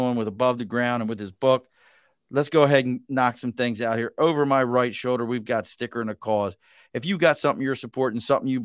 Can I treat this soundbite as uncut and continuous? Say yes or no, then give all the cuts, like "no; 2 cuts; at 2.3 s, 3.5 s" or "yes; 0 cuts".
yes; 0 cuts